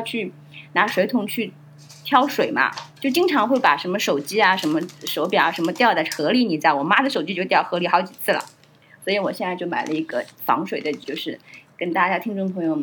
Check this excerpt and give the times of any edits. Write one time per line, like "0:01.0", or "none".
0:02.9
0:11.0